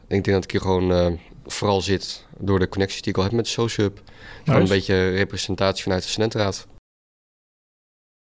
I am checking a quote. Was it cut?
no; 0 cuts

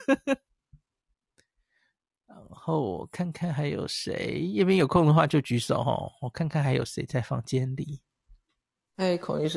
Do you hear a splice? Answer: no; 0 cuts

